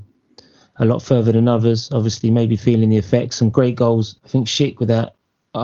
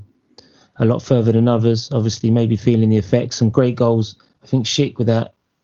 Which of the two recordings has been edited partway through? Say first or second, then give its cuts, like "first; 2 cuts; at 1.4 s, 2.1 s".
first; 1 cut; at 4.2 s